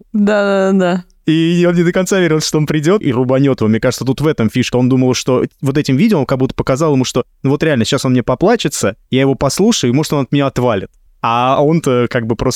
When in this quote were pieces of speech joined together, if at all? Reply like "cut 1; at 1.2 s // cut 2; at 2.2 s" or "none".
cut 1; at 3.0 s // cut 2; at 4.7 s // cut 3; at 9.0 s // cut 4; at 11.1 s